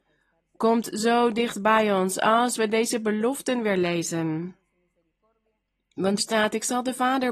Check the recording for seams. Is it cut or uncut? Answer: cut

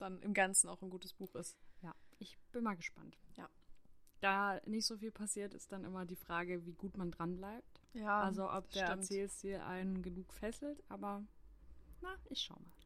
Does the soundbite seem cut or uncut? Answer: uncut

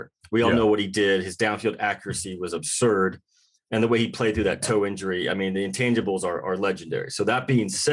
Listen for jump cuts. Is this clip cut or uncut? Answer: uncut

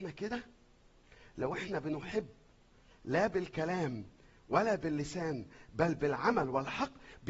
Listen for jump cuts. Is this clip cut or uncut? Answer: uncut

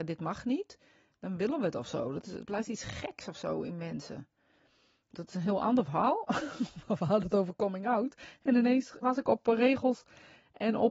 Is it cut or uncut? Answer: cut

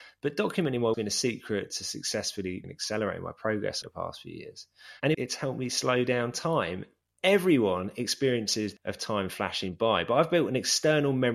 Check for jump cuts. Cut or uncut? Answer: cut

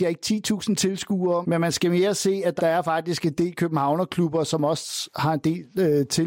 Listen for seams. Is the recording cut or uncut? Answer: cut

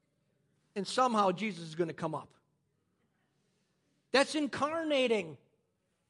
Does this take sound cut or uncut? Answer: uncut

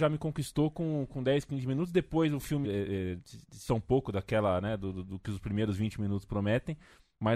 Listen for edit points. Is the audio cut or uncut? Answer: cut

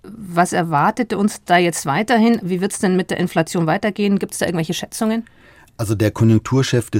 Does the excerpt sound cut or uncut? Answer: uncut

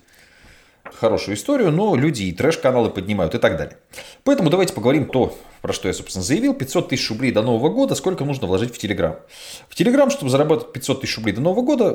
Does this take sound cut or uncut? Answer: cut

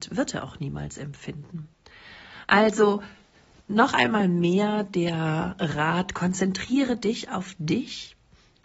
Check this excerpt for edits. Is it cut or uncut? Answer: uncut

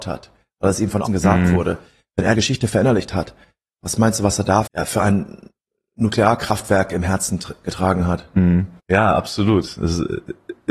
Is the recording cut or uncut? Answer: cut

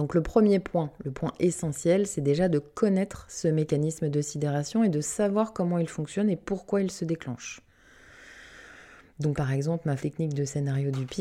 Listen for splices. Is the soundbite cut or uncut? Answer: cut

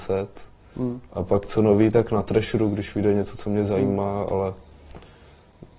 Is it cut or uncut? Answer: uncut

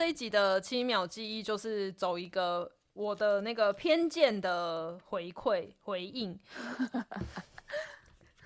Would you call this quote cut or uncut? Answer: uncut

